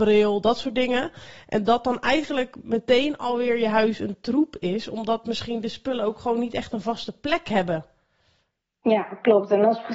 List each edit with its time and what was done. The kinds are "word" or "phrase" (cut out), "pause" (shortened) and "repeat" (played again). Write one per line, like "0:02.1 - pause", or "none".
none